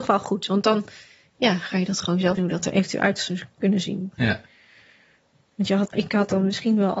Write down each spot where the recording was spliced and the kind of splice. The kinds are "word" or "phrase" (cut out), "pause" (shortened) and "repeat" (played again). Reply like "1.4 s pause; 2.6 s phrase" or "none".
2.4 s word; 5.9 s word